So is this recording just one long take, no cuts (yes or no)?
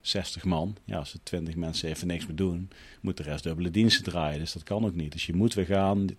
yes